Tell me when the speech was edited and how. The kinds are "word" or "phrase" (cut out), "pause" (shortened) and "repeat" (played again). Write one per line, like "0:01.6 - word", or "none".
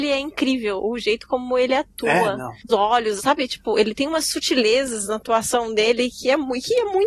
0:02.7 - word
0:03.2 - word